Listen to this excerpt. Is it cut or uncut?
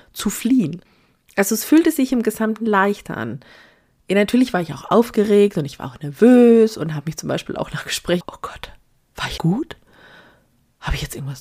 cut